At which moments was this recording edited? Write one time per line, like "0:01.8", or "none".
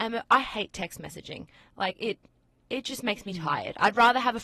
none